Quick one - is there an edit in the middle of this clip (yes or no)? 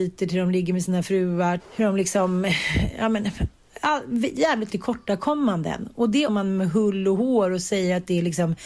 yes